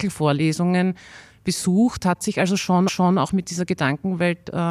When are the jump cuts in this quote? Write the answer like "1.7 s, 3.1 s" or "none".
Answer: 2.9 s